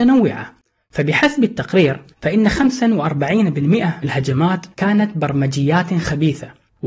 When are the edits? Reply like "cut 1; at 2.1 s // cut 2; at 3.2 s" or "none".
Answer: cut 1; at 2.1 s // cut 2; at 4.0 s // cut 3; at 4.7 s

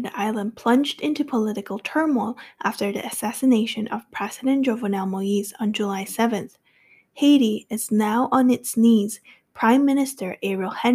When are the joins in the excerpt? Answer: none

